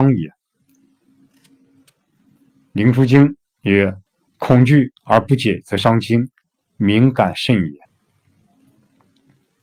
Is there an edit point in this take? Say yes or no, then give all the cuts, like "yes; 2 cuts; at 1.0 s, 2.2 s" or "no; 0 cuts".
yes; 3 cuts; at 4.1 s, 5.0 s, 7.8 s